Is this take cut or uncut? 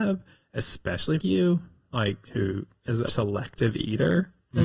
cut